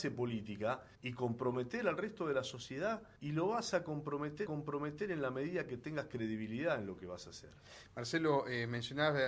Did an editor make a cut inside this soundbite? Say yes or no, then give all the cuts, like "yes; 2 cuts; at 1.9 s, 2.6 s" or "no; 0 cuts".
yes; 3 cuts; at 0.9 s, 3.2 s, 4.5 s